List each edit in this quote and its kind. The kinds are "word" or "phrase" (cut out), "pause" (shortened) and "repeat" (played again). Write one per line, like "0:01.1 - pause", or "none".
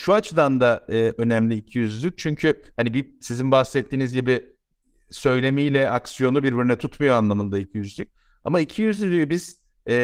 none